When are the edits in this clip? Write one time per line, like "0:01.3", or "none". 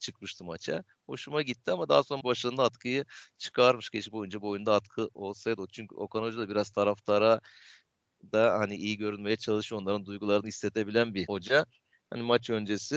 0:02.2
0:04.1